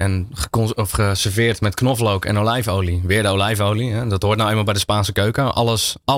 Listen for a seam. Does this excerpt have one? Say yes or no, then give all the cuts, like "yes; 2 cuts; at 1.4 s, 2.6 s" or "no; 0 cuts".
no; 0 cuts